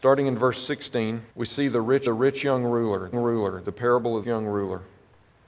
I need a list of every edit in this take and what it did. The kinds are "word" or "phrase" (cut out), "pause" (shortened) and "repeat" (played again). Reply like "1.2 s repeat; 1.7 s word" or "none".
1.3 s pause; 2.1 s repeat; 3.1 s repeat; 4.2 s phrase